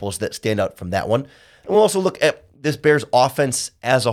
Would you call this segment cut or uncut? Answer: uncut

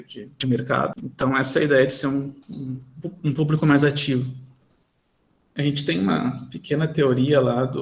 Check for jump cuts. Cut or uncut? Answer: uncut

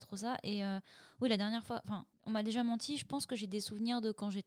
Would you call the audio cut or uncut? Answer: cut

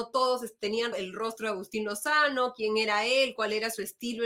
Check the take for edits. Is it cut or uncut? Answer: cut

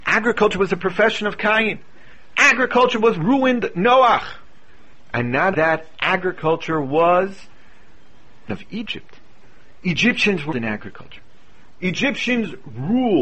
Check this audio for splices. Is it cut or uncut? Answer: cut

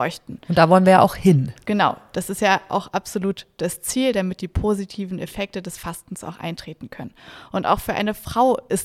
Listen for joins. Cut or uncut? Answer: uncut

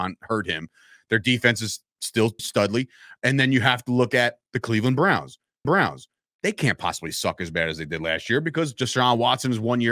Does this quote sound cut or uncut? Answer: cut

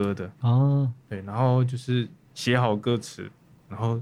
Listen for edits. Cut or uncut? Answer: uncut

